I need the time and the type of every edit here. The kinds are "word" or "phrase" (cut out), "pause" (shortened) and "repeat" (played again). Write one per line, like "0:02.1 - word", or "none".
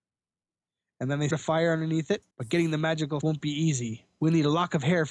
0:01.3 - word
0:02.3 - pause
0:03.2 - phrase